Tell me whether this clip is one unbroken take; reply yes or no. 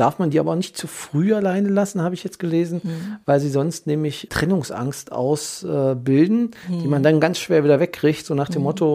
no